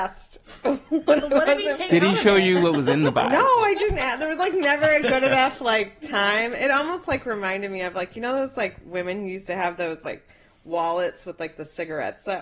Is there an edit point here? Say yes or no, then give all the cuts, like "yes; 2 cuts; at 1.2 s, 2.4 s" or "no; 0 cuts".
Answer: no; 0 cuts